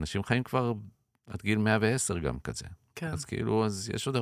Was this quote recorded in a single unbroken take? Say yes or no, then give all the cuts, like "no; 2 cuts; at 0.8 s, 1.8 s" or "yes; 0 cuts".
yes; 0 cuts